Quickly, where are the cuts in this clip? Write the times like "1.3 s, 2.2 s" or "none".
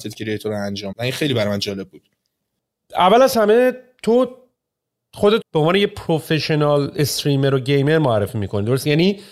0.9 s, 5.4 s